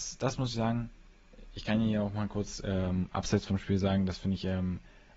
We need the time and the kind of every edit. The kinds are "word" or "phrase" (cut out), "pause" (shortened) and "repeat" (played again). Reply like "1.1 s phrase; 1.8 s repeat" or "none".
none